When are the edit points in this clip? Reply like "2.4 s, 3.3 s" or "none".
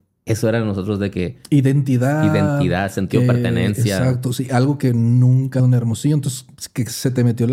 5.6 s